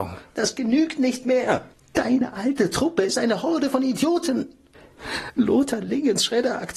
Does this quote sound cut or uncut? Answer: cut